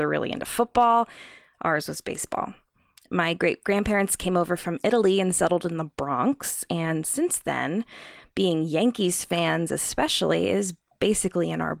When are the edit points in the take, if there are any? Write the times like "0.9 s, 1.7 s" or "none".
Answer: none